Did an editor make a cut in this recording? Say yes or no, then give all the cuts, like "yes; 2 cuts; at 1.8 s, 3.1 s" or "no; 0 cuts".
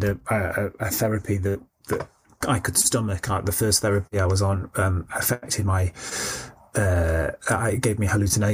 no; 0 cuts